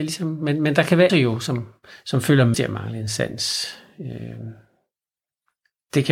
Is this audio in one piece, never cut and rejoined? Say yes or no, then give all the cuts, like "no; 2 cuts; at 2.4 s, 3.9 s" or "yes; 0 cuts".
no; 3 cuts; at 1.1 s, 1.9 s, 2.5 s